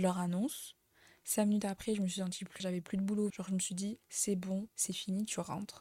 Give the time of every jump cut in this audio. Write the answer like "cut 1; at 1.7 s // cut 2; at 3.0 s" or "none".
cut 1; at 2.6 s // cut 2; at 3.3 s // cut 3; at 4.0 s // cut 4; at 4.7 s